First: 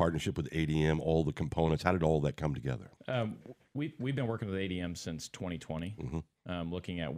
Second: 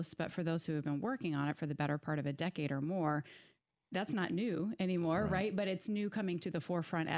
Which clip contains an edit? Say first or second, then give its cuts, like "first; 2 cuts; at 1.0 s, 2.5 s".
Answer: first; 1 cut; at 3.0 s